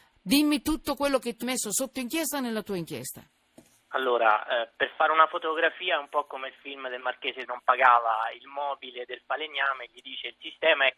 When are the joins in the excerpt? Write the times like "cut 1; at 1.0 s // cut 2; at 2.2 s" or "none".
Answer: cut 1; at 1.4 s // cut 2; at 7.4 s